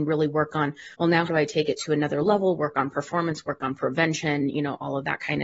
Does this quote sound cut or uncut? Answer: cut